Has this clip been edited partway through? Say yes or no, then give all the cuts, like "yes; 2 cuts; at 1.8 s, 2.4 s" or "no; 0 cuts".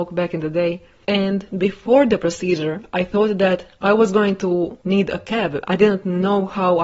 no; 0 cuts